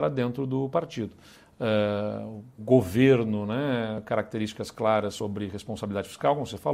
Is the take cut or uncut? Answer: cut